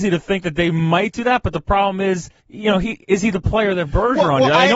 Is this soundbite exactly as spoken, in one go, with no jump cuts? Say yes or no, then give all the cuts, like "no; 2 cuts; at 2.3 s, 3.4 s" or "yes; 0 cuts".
no; 1 cut; at 2.4 s